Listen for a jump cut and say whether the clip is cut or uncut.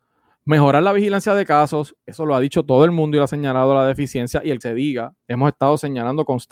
cut